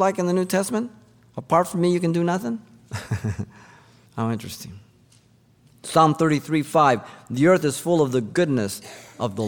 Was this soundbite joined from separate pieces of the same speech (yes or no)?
no